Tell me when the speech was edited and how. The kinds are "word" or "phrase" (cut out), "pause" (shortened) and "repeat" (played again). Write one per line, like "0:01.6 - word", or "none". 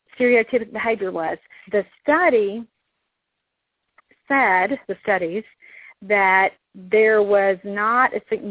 0:01.6 - pause
0:04.8 - pause